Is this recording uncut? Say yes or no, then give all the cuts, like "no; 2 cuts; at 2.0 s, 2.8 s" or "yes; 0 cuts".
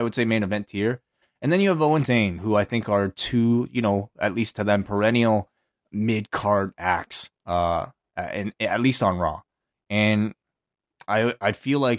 no; 1 cut; at 2.0 s